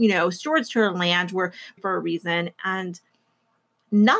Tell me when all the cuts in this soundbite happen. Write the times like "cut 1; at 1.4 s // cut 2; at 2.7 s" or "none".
cut 1; at 1.8 s